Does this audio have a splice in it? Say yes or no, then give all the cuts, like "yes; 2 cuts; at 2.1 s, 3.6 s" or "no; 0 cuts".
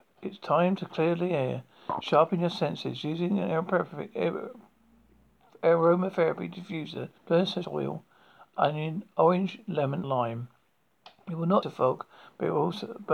yes; 4 cuts; at 7.2 s, 7.6 s, 10.0 s, 11.6 s